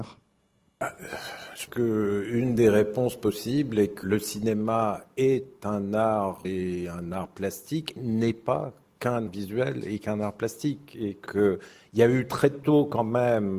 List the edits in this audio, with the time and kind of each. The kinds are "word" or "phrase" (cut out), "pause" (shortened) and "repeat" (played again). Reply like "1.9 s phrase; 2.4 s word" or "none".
1.7 s word; 4.0 s word; 6.4 s word; 8.0 s word; 9.3 s word; 11.3 s word